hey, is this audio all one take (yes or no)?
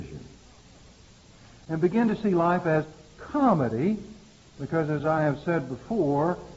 yes